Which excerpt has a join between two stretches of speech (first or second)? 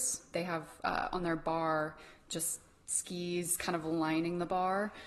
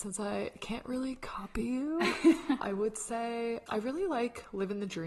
second